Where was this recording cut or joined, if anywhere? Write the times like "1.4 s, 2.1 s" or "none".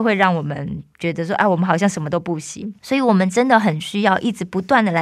2.8 s